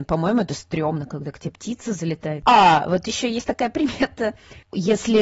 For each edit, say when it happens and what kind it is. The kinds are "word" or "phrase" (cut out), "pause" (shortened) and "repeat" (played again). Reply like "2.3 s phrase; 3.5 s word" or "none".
none